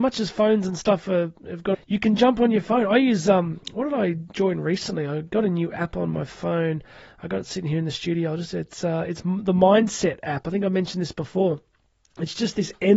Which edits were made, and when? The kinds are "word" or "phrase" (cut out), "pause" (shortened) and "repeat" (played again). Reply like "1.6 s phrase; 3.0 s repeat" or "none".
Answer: 1.7 s phrase